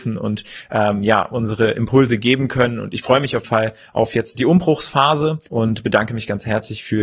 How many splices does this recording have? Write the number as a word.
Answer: three